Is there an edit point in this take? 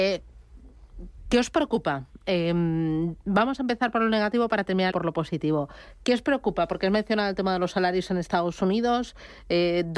yes; 1 cut; at 4.9 s

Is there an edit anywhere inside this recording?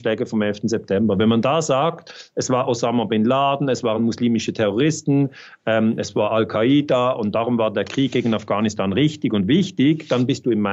no; 0 cuts

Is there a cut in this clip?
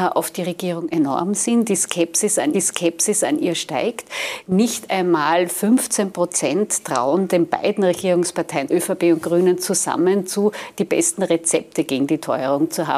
yes; 2 cuts; at 2.5 s, 8.7 s

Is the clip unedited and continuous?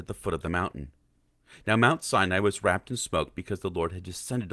yes; 0 cuts

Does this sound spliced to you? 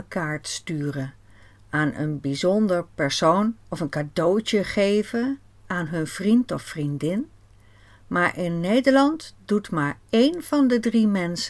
yes; 1 cut; at 3.6 s

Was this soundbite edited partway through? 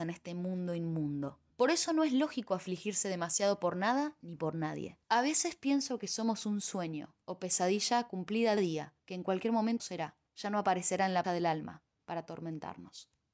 yes; 8 cuts; at 1.5 s, 5.0 s, 7.2 s, 8.6 s, 9.0 s, 9.8 s, 10.3 s, 11.2 s

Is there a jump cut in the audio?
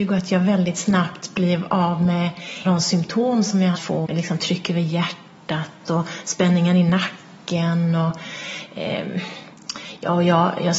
yes; 3 cuts; at 2.6 s, 3.7 s, 4.0 s

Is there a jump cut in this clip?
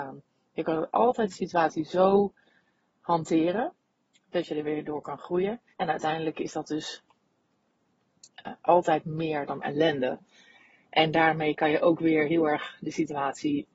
yes; 2 cuts; at 5.7 s, 9.6 s

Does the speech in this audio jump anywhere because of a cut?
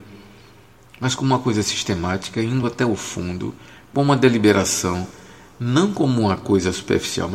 no; 0 cuts

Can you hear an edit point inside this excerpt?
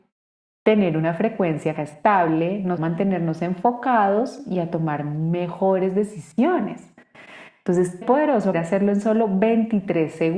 yes; 4 cuts; at 1.8 s, 2.8 s, 8.0 s, 8.5 s

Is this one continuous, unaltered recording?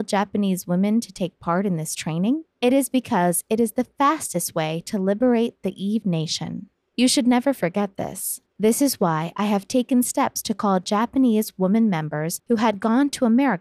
no; 3 cuts; at 2.5 s, 6.7 s, 8.5 s

